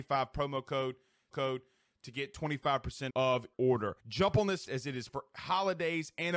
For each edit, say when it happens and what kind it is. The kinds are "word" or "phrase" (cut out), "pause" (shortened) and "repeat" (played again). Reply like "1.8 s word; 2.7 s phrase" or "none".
1.3 s repeat; 3.1 s word; 3.5 s word; 4.0 s pause; 4.7 s word; 5.1 s word